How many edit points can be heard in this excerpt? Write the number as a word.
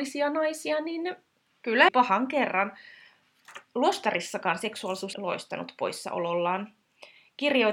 two